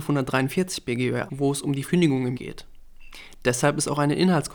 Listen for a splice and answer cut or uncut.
cut